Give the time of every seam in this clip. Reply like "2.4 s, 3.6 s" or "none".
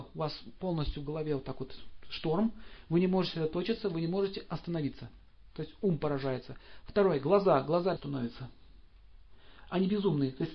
8.0 s

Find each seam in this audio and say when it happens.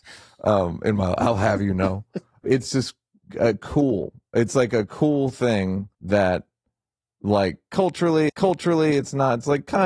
5.9 s, 8.3 s

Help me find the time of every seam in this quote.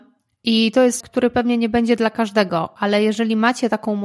1.0 s

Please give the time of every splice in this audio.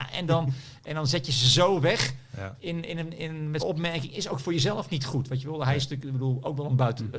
3.6 s

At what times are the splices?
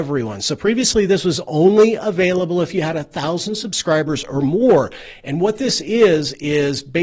none

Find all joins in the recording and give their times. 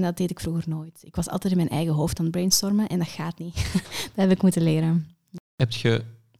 none

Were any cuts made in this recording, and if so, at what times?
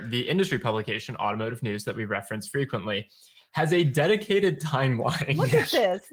none

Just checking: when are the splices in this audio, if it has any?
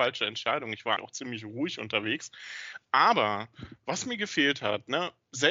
1.0 s

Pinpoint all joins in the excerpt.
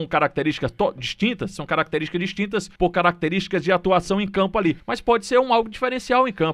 2.8 s, 4.8 s

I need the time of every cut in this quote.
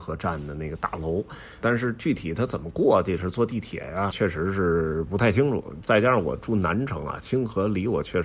1.6 s, 4.1 s

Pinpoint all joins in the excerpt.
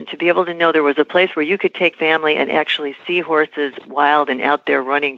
1.9 s

